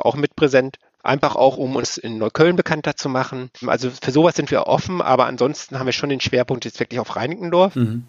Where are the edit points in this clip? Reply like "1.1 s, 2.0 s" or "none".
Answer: 3.5 s